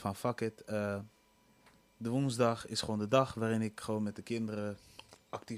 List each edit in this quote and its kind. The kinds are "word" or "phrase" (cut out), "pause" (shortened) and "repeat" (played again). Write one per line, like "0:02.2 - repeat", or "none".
none